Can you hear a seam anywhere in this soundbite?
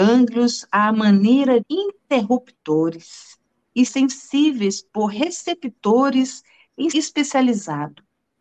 yes; 3 cuts; at 1.6 s, 3.9 s, 6.9 s

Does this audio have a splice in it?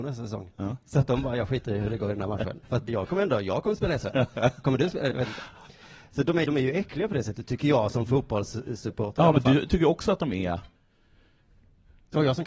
yes; 3 cuts; at 2.9 s, 5.1 s, 6.4 s

